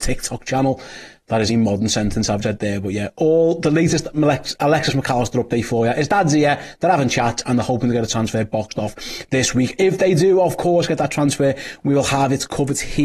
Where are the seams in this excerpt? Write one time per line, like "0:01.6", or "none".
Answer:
0:01.5
0:02.4